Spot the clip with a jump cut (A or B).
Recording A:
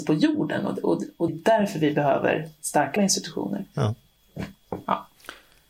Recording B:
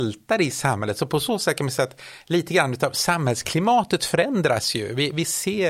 A